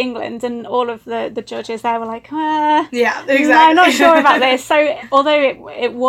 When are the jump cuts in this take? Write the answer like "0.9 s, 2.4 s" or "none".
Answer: none